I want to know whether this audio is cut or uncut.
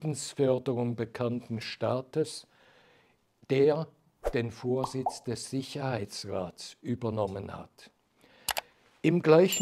uncut